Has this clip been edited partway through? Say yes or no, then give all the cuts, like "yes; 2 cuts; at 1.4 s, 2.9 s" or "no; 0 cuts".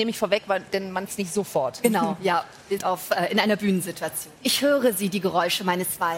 yes; 3 cuts; at 1.1 s, 2.8 s, 4.4 s